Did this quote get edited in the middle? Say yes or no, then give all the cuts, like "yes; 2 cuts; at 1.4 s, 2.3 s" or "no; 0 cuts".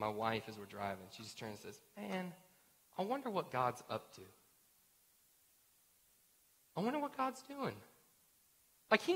no; 0 cuts